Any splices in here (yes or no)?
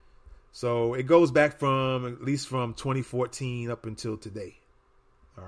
no